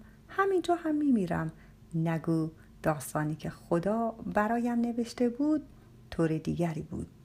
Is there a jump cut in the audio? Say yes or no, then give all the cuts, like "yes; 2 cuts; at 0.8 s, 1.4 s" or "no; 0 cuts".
no; 0 cuts